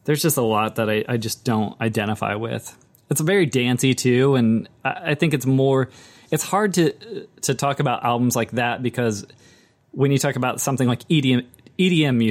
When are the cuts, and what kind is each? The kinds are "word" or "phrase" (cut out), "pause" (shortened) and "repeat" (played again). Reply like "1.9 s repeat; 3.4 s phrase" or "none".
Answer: none